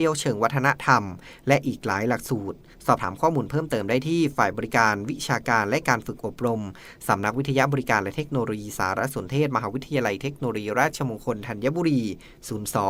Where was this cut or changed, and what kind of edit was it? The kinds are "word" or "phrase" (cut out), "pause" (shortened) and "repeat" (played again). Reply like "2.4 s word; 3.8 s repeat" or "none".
none